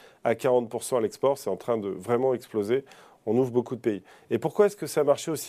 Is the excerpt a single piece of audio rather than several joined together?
yes; 0 cuts

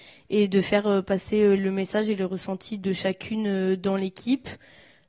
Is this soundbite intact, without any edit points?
yes; 0 cuts

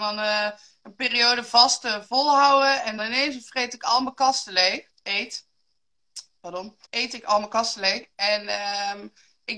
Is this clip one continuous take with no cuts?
no; 3 cuts; at 3.0 s, 4.9 s, 6.8 s

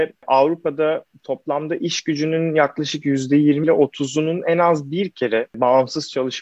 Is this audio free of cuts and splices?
no; 1 cut; at 3.6 s

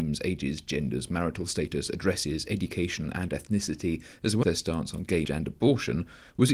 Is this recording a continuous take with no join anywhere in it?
no; 2 cuts; at 4.4 s, 5.2 s

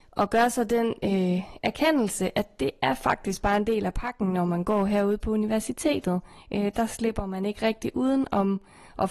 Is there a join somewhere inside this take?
no; 0 cuts

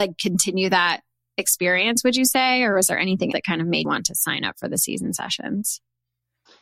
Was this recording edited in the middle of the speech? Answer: yes; 2 cuts; at 3.3 s, 3.8 s

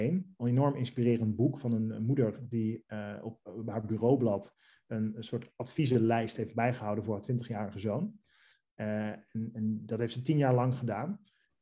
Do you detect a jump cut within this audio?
no; 0 cuts

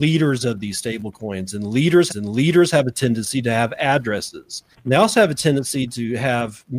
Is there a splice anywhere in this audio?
yes; 2 cuts; at 2.1 s, 4.7 s

